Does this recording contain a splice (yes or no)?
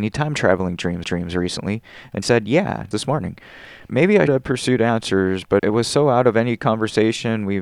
yes